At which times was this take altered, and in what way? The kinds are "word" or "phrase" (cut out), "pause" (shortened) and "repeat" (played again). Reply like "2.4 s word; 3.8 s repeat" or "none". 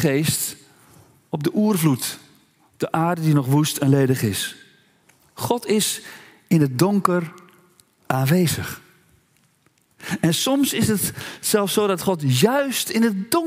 none

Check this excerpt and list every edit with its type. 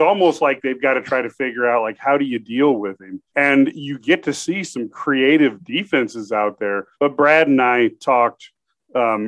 3.3 s pause; 6.9 s pause

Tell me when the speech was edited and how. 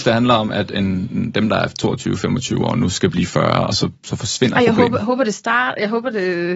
3.9 s pause

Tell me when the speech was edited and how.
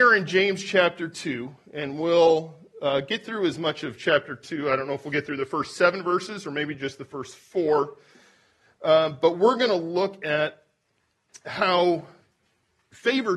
none

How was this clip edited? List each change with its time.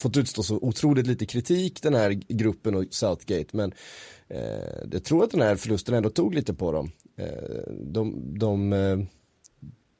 none

